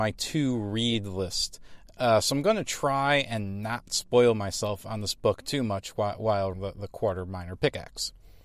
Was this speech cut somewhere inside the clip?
yes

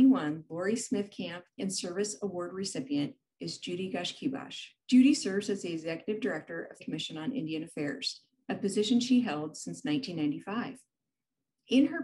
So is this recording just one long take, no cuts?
no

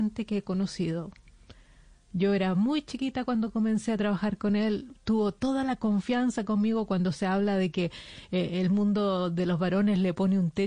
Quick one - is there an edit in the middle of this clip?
no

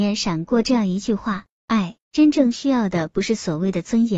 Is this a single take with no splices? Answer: no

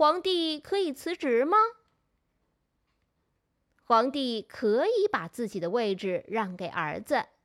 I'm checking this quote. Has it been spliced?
no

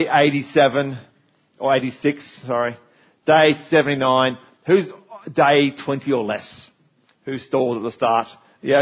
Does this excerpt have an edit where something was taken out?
no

